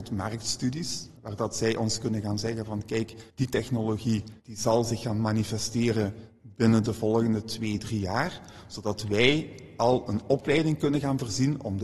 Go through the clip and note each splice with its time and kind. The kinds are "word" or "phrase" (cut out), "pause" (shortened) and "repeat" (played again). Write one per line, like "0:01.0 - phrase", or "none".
0:01.2 - pause
0:03.3 - pause
0:04.4 - pause